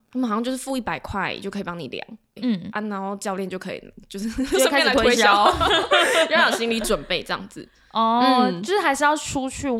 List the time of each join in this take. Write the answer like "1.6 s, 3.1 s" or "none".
2.4 s